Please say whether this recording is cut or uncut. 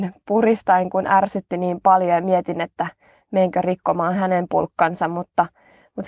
uncut